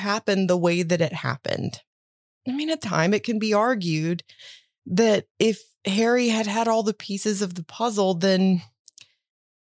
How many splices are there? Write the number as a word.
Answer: one